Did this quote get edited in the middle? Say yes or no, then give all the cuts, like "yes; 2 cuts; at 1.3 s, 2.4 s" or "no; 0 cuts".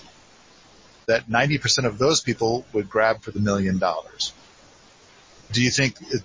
yes; 1 cut; at 4.9 s